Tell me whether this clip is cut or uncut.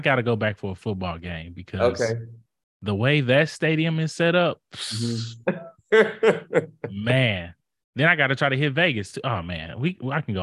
uncut